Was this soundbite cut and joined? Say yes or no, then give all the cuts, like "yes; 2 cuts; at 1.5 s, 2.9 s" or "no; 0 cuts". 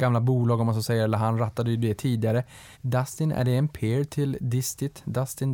yes; 1 cut; at 2.7 s